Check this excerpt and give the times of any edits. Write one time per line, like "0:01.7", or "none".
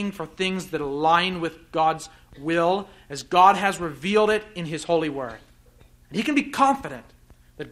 none